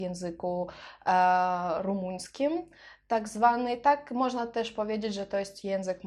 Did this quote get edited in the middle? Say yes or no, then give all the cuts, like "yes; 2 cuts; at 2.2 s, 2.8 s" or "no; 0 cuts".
no; 0 cuts